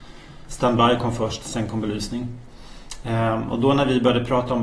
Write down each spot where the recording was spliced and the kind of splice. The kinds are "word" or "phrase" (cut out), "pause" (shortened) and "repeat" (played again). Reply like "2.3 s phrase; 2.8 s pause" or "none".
none